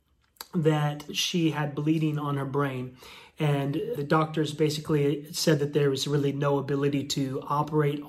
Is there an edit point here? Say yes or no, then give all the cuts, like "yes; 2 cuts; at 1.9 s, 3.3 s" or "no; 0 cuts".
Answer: yes; 2 cuts; at 1.1 s, 3.9 s